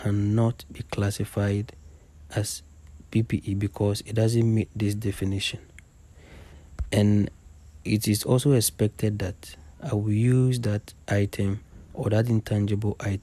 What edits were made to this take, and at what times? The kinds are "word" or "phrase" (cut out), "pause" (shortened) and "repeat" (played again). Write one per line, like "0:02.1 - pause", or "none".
0:09.7 - pause